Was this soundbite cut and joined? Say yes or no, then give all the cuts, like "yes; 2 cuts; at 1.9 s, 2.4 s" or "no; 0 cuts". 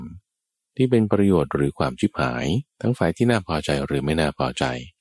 yes; 1 cut; at 2.7 s